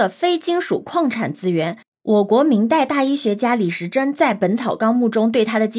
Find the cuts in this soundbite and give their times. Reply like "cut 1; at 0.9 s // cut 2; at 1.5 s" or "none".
none